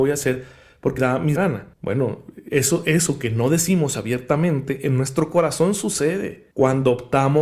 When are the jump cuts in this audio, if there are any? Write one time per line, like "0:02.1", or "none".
0:01.0
0:01.4
0:01.7
0:06.5